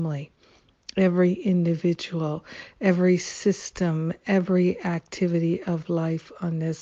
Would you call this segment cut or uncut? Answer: uncut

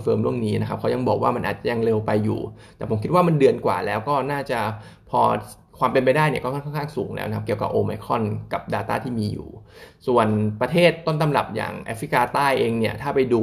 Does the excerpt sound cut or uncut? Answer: uncut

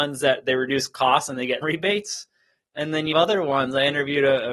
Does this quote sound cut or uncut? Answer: cut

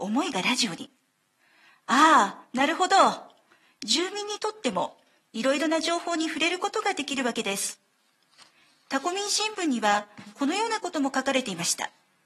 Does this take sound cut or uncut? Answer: uncut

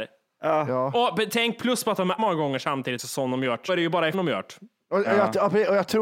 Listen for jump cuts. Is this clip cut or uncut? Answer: cut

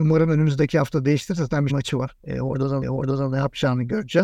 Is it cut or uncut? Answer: cut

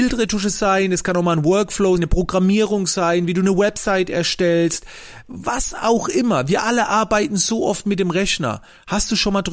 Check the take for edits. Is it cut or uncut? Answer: cut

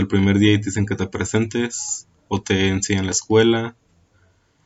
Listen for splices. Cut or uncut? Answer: uncut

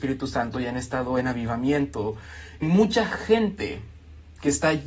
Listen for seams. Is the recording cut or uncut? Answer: cut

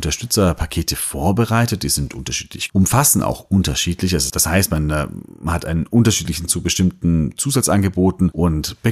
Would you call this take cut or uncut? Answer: cut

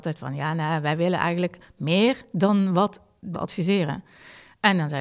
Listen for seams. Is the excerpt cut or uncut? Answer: cut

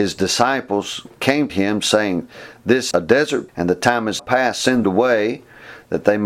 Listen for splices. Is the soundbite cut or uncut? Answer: cut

